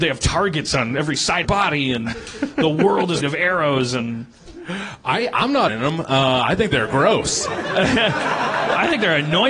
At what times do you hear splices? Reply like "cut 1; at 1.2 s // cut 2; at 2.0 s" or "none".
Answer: cut 1; at 1.4 s // cut 2; at 2.1 s // cut 3; at 3.2 s // cut 4; at 5.7 s